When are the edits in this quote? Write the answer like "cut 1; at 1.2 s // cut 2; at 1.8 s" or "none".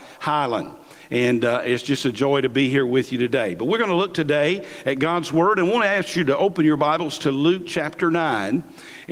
none